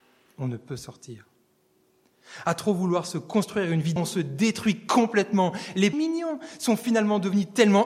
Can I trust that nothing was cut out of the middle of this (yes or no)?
no